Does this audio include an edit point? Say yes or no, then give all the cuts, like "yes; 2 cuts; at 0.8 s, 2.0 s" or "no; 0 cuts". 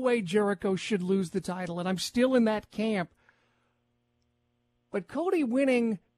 no; 0 cuts